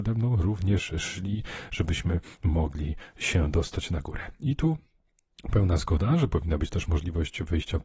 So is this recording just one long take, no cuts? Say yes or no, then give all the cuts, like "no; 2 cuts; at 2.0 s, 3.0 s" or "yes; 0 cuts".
yes; 0 cuts